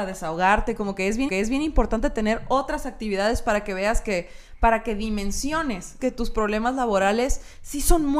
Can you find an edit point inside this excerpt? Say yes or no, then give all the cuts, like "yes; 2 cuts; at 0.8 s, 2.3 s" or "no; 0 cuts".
yes; 2 cuts; at 1.3 s, 6.0 s